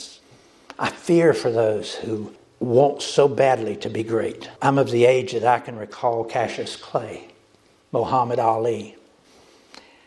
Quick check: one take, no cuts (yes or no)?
no